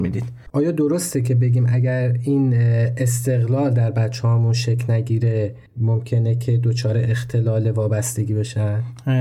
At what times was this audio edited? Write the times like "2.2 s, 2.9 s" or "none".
5.7 s